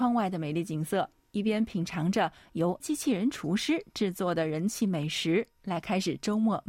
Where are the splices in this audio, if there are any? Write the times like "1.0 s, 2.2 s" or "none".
2.8 s